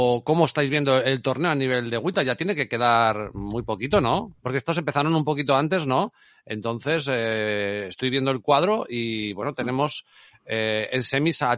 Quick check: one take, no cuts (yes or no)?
no